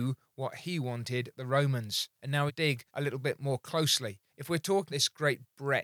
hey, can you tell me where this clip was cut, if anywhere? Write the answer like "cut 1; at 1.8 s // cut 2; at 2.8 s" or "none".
cut 1; at 1.3 s // cut 2; at 2.1 s // cut 3; at 2.5 s // cut 4; at 2.9 s // cut 5; at 4.3 s // cut 6; at 4.9 s

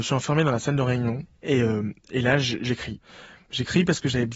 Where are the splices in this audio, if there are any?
none

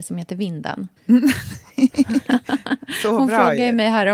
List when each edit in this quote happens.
cut 1; at 1.0 s

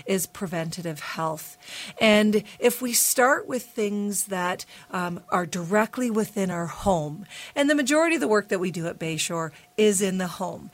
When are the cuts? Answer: none

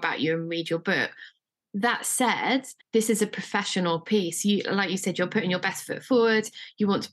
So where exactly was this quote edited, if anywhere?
cut 1; at 2.8 s

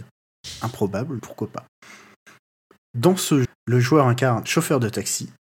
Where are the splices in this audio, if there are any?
cut 1; at 1.2 s // cut 2; at 3.4 s // cut 3; at 4.4 s

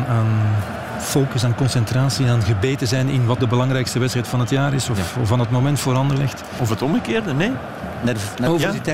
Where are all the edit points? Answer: cut 1; at 3.4 s

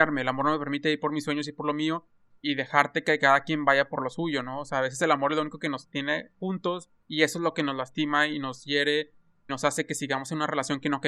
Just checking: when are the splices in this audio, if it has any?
cut 1; at 2.4 s // cut 2; at 7.0 s // cut 3; at 9.5 s

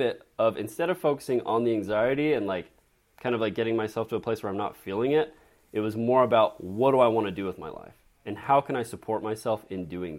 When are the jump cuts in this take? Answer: none

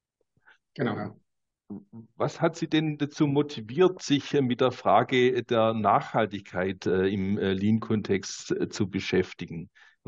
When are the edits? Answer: none

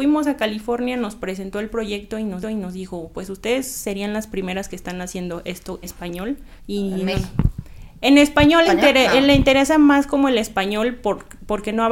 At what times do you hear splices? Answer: cut 1; at 2.4 s // cut 2; at 5.8 s // cut 3; at 6.6 s // cut 4; at 8.6 s

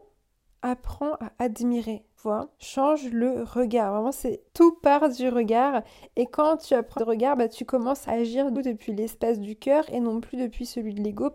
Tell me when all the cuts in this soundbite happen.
cut 1; at 2.2 s // cut 2; at 2.5 s // cut 3; at 4.5 s // cut 4; at 7.0 s // cut 5; at 8.0 s // cut 6; at 8.5 s

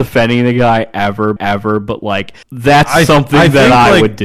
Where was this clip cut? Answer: cut 1; at 1.4 s // cut 2; at 2.4 s

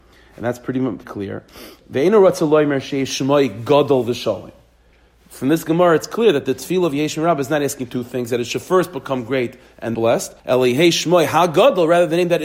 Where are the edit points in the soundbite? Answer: cut 1; at 1.0 s // cut 2; at 9.9 s // cut 3; at 10.4 s

